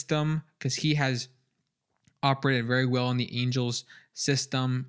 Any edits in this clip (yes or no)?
no